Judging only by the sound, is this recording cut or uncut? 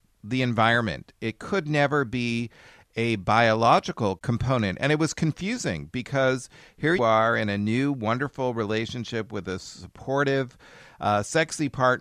cut